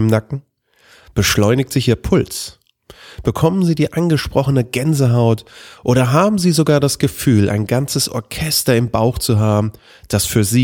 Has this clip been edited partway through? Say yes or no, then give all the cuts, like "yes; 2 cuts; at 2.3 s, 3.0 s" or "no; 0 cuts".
no; 0 cuts